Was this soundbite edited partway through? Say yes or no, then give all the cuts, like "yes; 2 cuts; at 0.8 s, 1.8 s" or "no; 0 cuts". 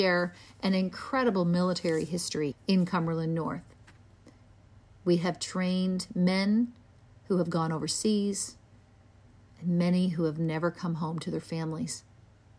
yes; 1 cut; at 2.5 s